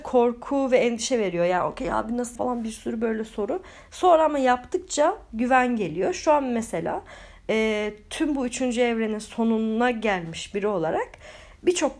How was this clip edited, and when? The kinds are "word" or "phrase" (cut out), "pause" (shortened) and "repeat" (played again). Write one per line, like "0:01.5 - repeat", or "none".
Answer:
0:02.4 - phrase